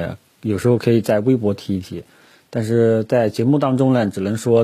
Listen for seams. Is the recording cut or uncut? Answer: uncut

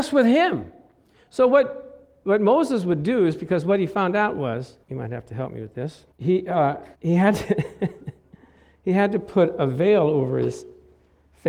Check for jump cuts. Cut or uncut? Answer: cut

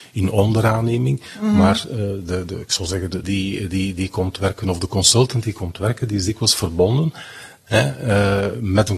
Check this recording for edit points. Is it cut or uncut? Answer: cut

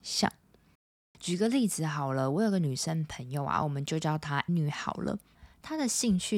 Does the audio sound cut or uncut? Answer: cut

